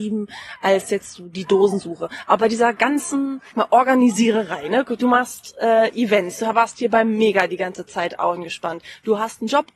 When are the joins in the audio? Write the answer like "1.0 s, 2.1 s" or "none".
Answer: 3.5 s